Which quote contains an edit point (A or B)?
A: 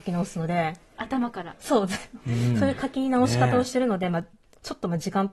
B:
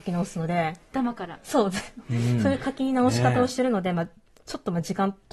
B